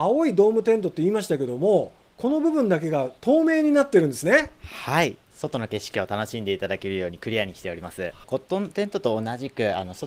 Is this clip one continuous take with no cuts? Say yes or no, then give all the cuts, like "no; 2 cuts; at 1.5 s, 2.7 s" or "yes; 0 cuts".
no; 1 cut; at 2.1 s